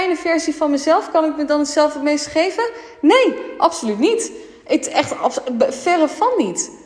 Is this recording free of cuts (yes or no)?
yes